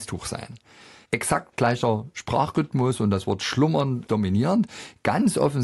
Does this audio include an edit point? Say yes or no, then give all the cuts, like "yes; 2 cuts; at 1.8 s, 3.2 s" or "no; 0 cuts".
yes; 1 cut; at 4.1 s